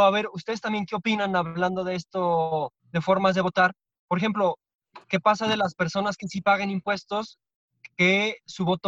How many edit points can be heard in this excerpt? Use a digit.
2